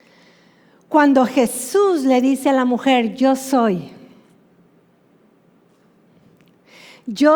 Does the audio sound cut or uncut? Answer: uncut